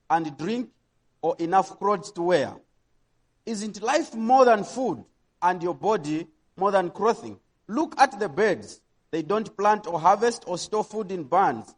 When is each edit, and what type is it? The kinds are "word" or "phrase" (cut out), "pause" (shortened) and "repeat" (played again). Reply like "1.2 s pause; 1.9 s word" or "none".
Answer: none